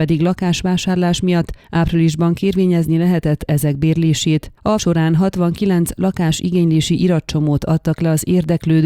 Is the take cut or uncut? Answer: cut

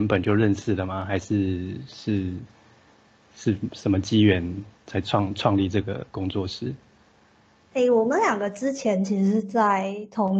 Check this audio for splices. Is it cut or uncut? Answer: cut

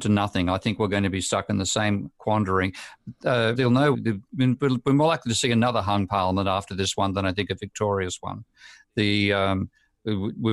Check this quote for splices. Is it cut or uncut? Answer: cut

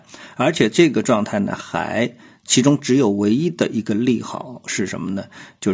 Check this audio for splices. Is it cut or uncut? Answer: uncut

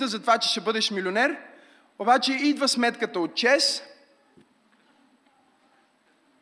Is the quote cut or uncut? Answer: uncut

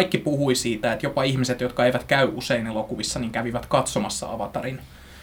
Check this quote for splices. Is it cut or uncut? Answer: uncut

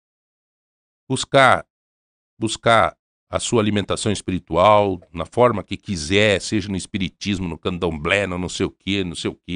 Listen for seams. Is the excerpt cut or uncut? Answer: uncut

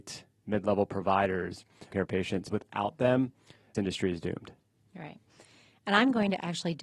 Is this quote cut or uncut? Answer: cut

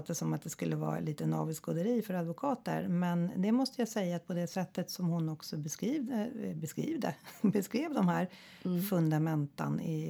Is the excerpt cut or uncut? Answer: uncut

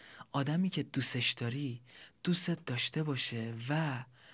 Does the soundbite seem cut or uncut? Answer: uncut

